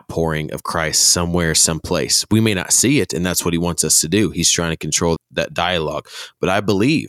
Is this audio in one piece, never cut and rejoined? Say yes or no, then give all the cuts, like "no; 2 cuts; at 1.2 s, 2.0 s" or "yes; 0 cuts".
no; 1 cut; at 5.2 s